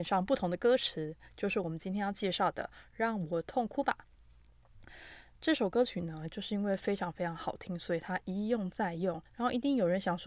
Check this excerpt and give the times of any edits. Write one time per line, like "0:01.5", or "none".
0:09.3